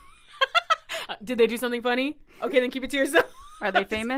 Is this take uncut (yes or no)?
yes